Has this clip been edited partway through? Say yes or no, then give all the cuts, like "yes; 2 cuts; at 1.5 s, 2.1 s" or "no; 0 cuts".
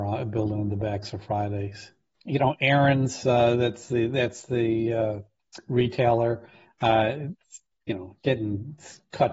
no; 0 cuts